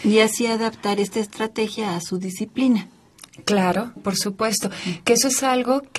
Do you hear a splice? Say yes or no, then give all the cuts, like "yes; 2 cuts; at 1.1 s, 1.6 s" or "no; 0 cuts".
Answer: yes; 1 cut; at 4.0 s